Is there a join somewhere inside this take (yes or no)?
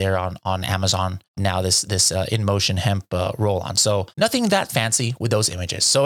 yes